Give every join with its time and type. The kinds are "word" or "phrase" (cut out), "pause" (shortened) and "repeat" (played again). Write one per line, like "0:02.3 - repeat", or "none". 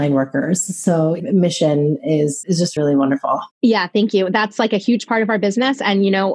0:01.2 - phrase
0:02.4 - word
0:02.8 - word
0:03.5 - pause